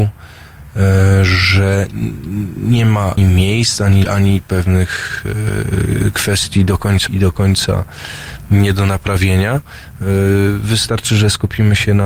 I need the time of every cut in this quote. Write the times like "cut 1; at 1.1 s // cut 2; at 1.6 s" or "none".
cut 1; at 3.2 s // cut 2; at 4.0 s // cut 3; at 4.4 s // cut 4; at 7.1 s